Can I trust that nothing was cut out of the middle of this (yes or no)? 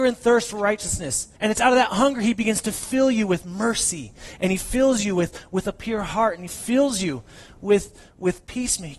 no